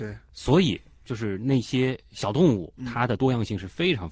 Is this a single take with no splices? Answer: no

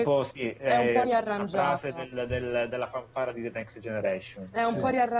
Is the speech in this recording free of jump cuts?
yes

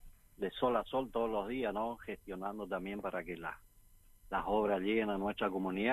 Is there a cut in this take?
no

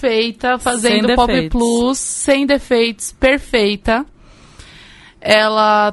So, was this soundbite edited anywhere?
no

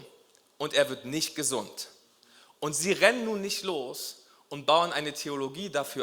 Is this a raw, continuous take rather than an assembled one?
yes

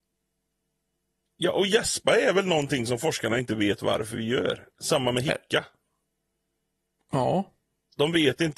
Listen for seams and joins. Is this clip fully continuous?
yes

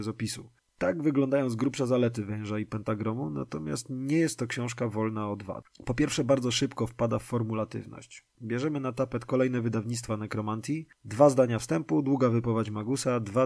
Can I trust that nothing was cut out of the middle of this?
yes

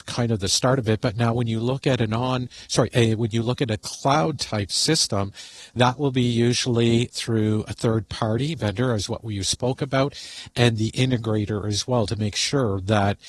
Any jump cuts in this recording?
no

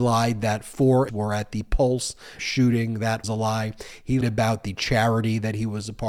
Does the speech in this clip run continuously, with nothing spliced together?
no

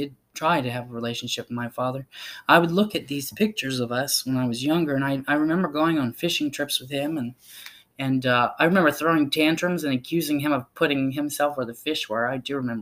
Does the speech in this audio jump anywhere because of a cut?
no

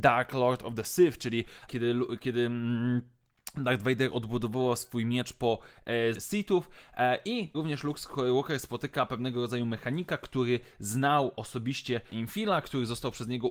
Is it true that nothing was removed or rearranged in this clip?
no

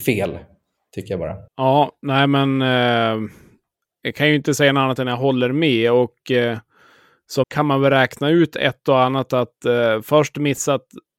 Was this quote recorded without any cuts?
no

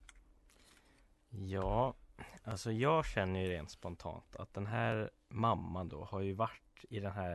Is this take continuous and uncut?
yes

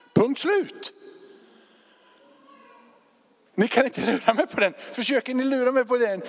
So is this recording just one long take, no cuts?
yes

